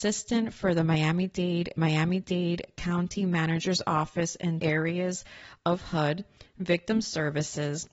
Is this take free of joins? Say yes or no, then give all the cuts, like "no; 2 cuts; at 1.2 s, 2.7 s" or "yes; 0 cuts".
no; 2 cuts; at 1.8 s, 4.6 s